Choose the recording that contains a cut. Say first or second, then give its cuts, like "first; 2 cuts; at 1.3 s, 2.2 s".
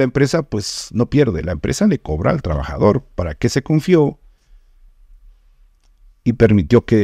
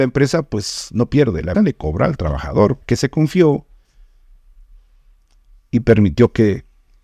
second; 2 cuts; at 1.5 s, 2.8 s